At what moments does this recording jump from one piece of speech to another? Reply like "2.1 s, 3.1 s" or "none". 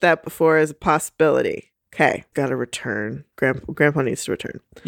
2.3 s, 3.3 s